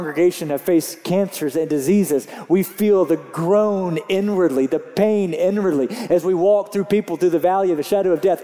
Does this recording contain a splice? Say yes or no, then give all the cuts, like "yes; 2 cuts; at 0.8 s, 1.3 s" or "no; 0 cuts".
no; 0 cuts